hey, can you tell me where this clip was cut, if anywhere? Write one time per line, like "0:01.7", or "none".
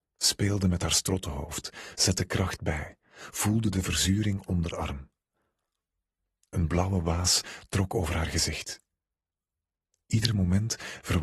0:04.5